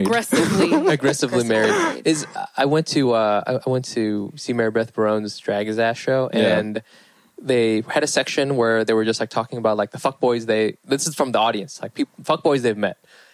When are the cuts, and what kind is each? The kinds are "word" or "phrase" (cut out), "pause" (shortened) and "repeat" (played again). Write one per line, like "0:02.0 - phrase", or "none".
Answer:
none